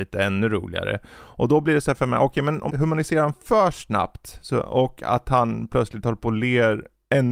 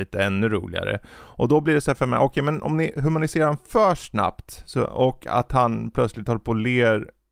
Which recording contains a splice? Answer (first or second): first